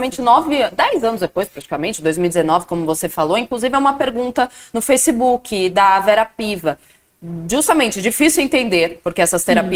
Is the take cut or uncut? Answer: uncut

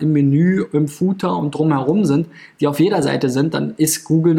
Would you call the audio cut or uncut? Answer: uncut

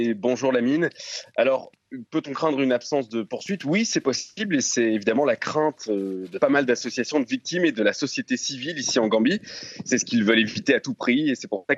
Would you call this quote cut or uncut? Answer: uncut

